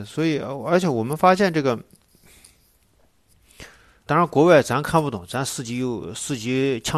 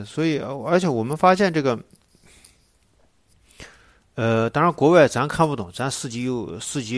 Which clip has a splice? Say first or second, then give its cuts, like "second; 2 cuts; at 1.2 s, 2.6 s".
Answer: first; 1 cut; at 4.1 s